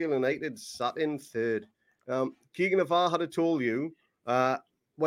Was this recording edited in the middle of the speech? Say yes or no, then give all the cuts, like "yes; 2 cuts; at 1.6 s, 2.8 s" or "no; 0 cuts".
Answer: no; 0 cuts